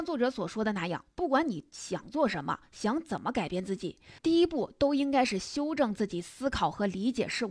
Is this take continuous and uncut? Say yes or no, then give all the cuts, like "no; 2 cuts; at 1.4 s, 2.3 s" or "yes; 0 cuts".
no; 1 cut; at 4.2 s